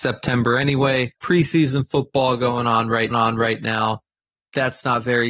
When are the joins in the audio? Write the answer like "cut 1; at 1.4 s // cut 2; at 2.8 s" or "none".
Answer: cut 1; at 1.2 s // cut 2; at 3.1 s

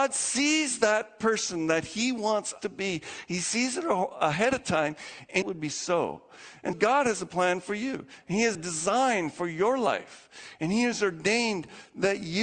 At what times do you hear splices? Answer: cut 1; at 2.6 s // cut 2; at 5.4 s // cut 3; at 6.7 s // cut 4; at 8.5 s

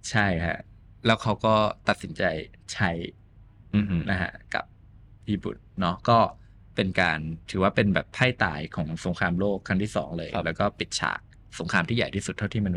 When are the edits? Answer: cut 1; at 7.4 s

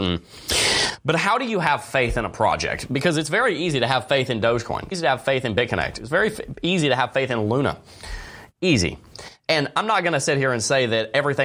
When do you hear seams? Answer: cut 1; at 4.9 s

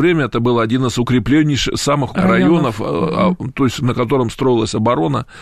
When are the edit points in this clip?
cut 1; at 2.1 s

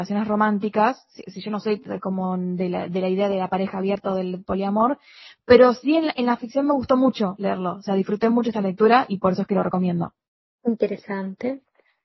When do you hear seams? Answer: none

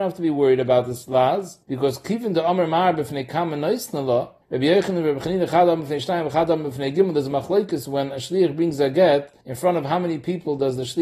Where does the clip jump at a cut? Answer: cut 1; at 1.6 s // cut 2; at 4.4 s // cut 3; at 9.4 s

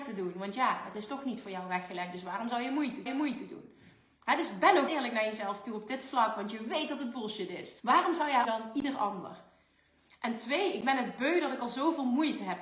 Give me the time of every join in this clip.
cut 1; at 3.1 s // cut 2; at 4.9 s // cut 3; at 7.8 s // cut 4; at 8.4 s

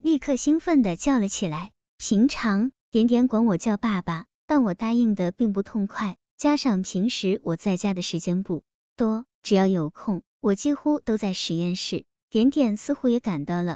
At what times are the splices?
cut 1; at 2.8 s // cut 2; at 9.3 s // cut 3; at 10.3 s

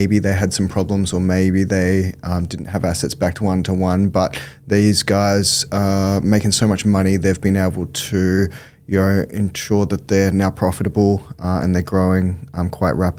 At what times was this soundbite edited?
none

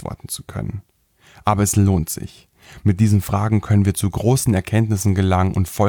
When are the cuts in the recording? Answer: none

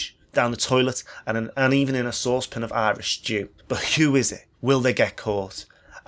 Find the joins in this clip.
cut 1; at 3.6 s // cut 2; at 4.5 s

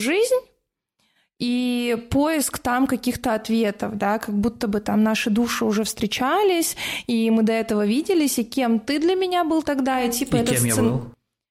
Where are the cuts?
none

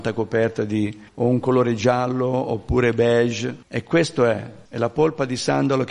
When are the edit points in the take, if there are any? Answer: cut 1; at 1.1 s // cut 2; at 3.6 s // cut 3; at 4.7 s

